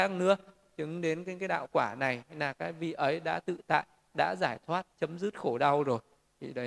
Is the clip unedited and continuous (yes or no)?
no